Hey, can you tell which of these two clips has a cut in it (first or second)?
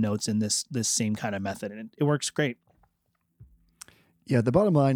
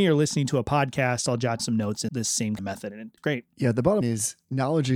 second